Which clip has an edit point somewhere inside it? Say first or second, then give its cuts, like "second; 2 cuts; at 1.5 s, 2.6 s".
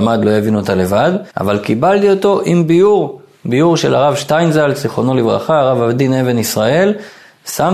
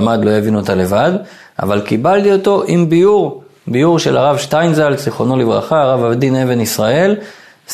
first; 1 cut; at 1.3 s